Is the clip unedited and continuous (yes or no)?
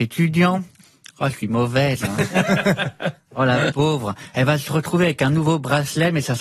yes